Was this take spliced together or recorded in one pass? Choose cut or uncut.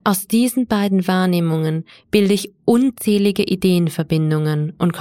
uncut